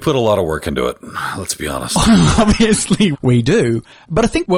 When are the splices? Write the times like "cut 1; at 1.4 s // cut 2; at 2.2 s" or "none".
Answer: cut 1; at 3.1 s